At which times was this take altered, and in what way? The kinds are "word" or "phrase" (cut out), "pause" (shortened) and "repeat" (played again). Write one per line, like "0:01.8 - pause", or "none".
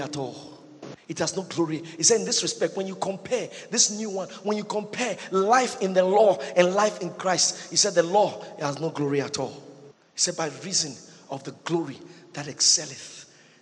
none